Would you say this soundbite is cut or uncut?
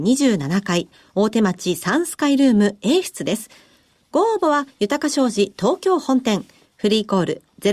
uncut